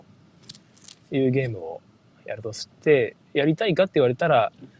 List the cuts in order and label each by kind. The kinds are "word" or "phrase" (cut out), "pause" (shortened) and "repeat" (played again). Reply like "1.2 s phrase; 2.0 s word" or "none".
none